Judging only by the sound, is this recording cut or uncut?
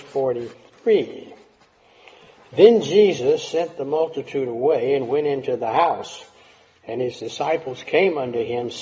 uncut